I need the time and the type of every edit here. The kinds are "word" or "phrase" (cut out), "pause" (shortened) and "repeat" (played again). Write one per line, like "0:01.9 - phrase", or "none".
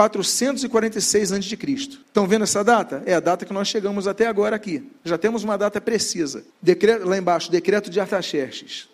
0:02.0 - pause
0:05.0 - pause
0:06.5 - pause